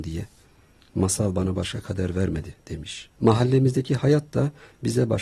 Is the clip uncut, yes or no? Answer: no